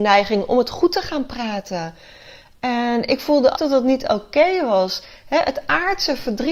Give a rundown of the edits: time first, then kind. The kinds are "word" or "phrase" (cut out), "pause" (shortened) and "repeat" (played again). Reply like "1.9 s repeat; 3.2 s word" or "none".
3.6 s word